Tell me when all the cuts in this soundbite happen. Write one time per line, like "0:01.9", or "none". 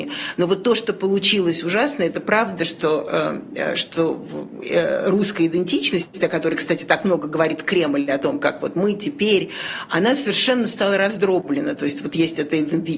none